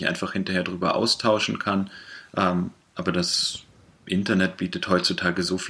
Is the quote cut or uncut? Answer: uncut